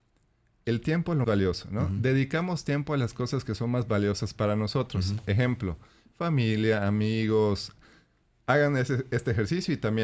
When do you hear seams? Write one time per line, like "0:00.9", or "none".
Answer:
0:01.2

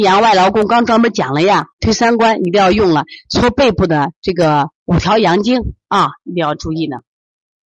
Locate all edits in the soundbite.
0:01.7
0:04.8

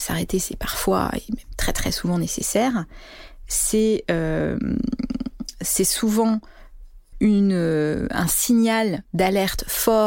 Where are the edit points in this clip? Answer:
0:07.1

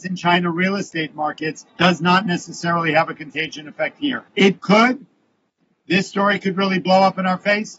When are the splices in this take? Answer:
0:01.7
0:04.3

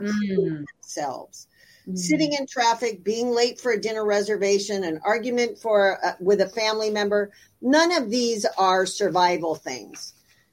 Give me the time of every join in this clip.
none

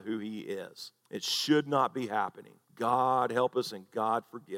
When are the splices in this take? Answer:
0:01.0
0:02.6

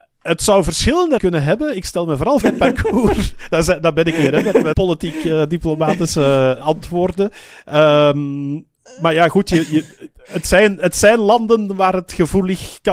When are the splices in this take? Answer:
0:01.2
0:02.4
0:04.7
0:06.6

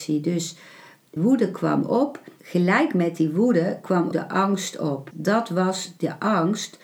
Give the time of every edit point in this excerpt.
0:01.2
0:02.4
0:04.1
0:05.1

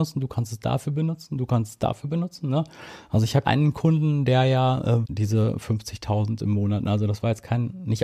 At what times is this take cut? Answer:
0:03.4
0:05.0

